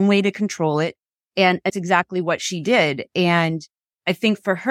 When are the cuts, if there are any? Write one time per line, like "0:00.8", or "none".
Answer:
0:01.7